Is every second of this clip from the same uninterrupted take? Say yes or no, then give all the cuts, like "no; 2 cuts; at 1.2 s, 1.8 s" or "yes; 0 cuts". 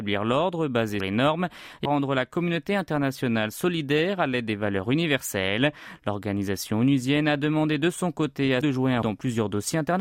no; 4 cuts; at 1.0 s, 1.8 s, 8.6 s, 9.0 s